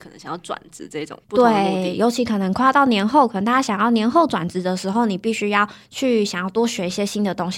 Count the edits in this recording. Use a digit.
1